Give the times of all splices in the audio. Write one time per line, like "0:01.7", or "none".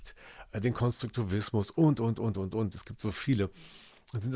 none